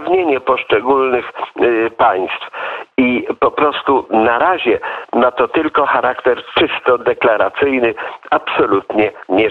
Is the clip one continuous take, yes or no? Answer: yes